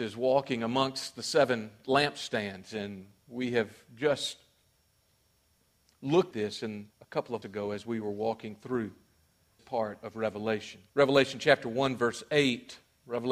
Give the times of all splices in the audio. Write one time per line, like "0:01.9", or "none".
0:06.3
0:06.9
0:07.4
0:09.6
0:10.9